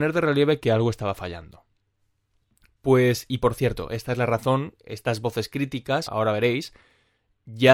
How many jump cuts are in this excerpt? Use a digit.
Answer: 1